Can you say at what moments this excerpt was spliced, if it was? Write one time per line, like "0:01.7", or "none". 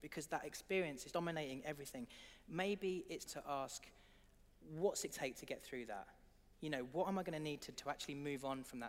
0:01.1
0:03.3
0:05.1
0:07.7